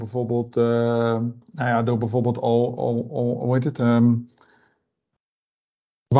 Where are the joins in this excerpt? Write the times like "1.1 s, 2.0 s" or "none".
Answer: 1.4 s

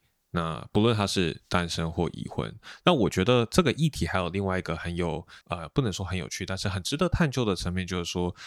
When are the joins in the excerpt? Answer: 5.4 s

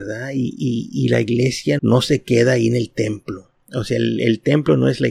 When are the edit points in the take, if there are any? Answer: 1.8 s

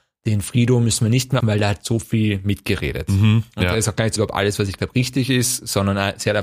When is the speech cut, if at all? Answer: 1.4 s, 4.2 s, 4.8 s

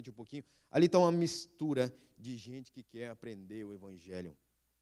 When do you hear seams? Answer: none

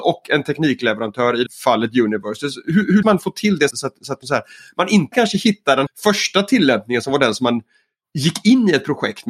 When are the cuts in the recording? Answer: 1.5 s, 3.0 s, 3.7 s, 4.2 s, 5.1 s, 5.9 s

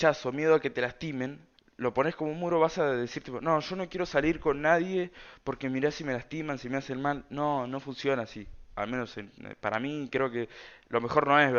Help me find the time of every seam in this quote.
1.6 s

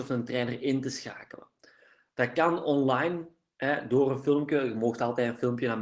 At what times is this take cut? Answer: none

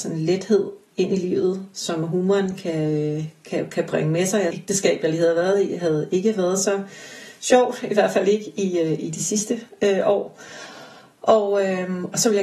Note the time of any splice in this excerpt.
4.5 s

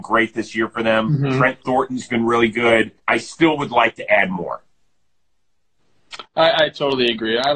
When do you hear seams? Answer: 3.0 s

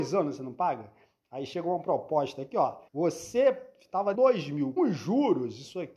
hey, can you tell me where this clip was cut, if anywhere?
2.9 s, 4.1 s, 4.8 s

